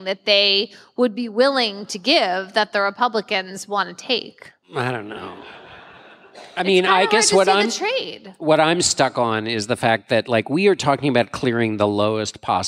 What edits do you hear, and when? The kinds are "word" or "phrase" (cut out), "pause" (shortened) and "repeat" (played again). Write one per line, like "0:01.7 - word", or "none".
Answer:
0:04.6 - pause